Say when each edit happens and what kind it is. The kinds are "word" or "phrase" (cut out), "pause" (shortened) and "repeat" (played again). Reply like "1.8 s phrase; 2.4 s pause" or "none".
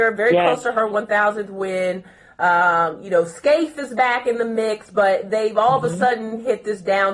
none

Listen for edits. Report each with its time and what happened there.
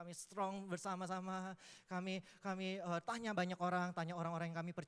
none

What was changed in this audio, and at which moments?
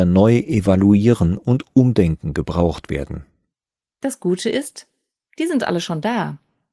none

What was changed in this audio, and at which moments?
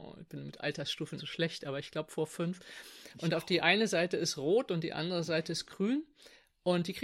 1.2 s word

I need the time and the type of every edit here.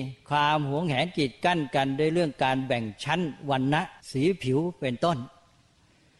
4.0 s pause

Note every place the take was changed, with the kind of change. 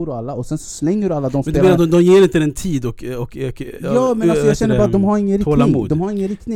none

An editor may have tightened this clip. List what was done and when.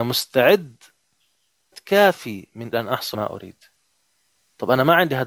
1.7 s word; 2.7 s word; 3.1 s word

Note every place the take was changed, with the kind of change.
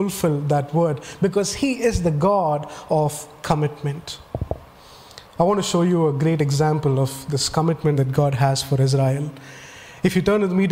5.3 s pause

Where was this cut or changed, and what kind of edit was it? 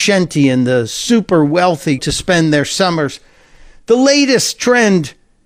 2.0 s word

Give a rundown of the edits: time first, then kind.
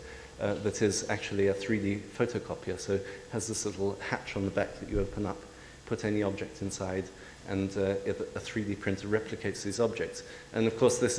none

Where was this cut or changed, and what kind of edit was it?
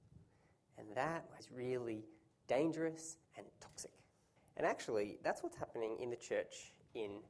1.4 s word; 3.2 s pause; 4.4 s pause

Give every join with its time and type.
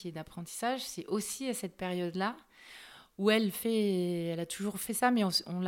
none

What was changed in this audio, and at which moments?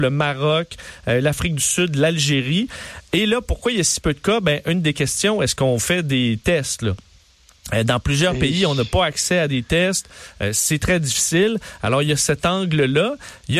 none

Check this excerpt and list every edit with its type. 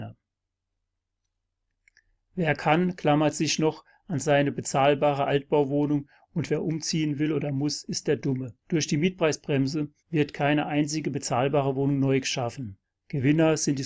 8.6 s pause; 10.0 s pause; 12.8 s pause

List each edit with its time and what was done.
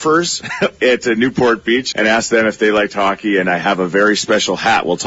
1.9 s word

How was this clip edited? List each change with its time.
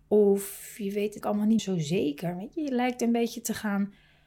1.2 s word; 1.6 s word

